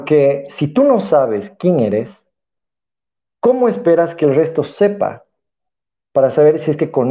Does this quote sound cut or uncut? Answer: uncut